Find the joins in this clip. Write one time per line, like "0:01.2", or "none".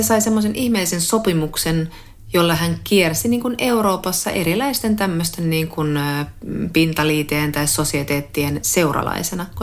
none